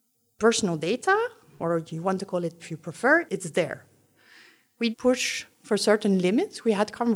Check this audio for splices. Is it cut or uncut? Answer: cut